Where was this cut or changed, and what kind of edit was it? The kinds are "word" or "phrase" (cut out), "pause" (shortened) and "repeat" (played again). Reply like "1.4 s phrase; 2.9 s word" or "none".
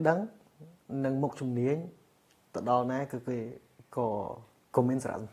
none

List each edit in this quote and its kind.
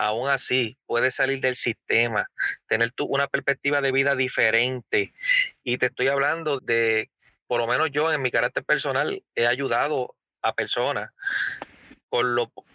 6.6 s word

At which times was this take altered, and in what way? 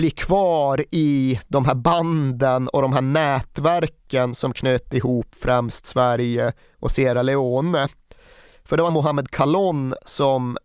8.9 s phrase

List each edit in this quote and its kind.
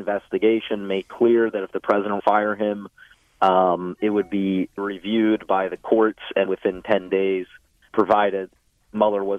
2.2 s phrase; 4.0 s word; 4.8 s word; 6.5 s word; 7.9 s word

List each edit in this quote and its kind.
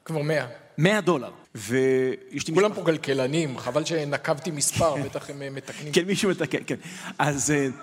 1.4 s pause

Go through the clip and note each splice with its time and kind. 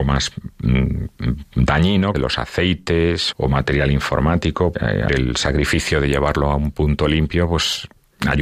2.1 s phrase; 3.3 s word; 4.7 s word; 5.1 s word

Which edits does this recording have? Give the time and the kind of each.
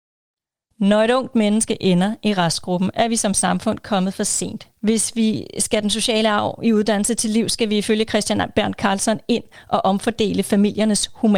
4.8 s pause

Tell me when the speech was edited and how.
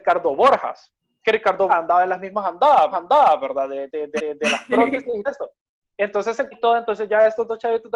1.0 s pause; 1.7 s word; 2.9 s repeat; 4.2 s repeat; 5.2 s word; 6.5 s word

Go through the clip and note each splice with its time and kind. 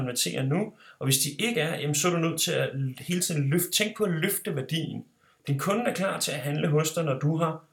none

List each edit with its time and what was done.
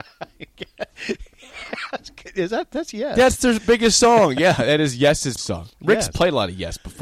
5.4 s word

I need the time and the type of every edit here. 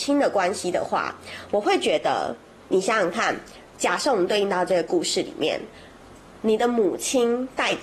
2.7 s word

